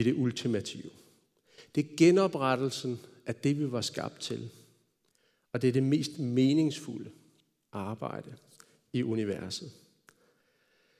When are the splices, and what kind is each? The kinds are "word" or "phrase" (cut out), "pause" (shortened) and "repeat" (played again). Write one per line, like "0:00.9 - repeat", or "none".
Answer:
none